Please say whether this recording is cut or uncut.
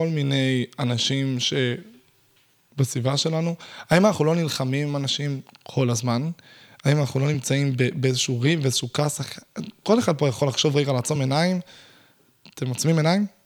uncut